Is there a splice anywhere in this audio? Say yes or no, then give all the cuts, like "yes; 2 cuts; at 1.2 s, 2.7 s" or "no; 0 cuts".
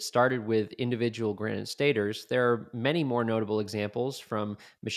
no; 0 cuts